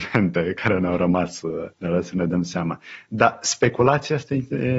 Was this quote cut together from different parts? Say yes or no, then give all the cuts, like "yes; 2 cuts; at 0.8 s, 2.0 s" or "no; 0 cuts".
yes; 1 cut; at 1.7 s